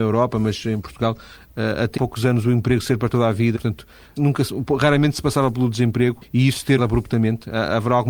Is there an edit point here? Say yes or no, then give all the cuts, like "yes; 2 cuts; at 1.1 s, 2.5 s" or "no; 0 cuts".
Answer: yes; 5 cuts; at 2.0 s, 3.6 s, 4.2 s, 6.2 s, 6.8 s